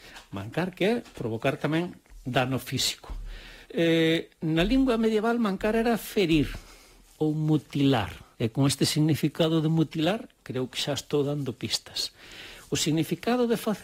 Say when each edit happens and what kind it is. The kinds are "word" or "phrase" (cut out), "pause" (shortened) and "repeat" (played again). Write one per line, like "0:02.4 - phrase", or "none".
0:03.6 - pause
0:08.3 - pause